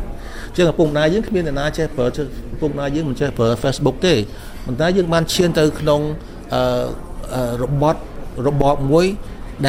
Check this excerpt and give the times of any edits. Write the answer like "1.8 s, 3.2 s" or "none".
2.1 s